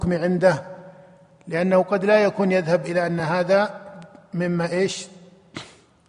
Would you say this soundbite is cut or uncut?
uncut